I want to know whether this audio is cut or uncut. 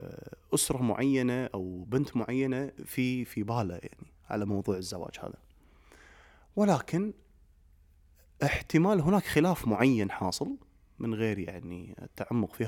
uncut